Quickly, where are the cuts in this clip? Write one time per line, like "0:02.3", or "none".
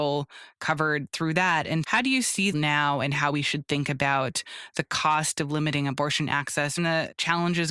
0:01.8
0:02.5
0:06.8